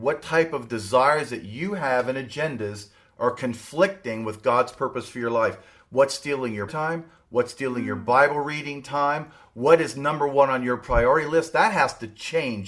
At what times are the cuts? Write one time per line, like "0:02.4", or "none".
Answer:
0:06.7